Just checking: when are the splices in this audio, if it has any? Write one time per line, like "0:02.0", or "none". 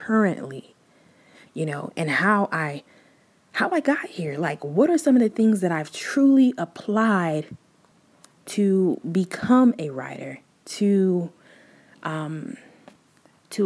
none